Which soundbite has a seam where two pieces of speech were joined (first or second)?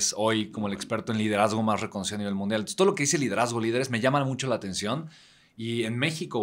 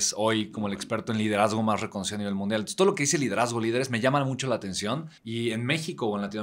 second